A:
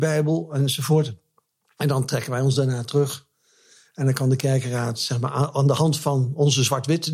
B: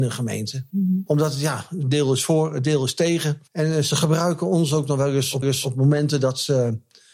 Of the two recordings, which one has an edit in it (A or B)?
B